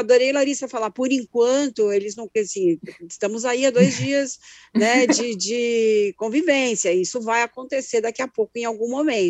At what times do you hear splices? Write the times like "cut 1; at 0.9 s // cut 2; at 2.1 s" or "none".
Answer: cut 1; at 2.3 s